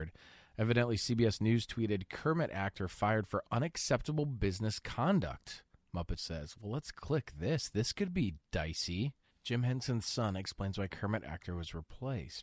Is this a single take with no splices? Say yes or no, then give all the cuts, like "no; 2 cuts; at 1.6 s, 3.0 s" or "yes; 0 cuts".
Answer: no; 2 cuts; at 6.2 s, 9.2 s